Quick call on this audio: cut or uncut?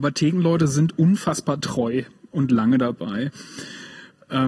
uncut